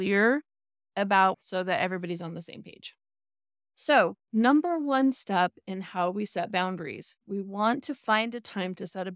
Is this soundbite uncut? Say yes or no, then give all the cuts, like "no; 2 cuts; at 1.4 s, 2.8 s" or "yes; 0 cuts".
no; 1 cut; at 1.3 s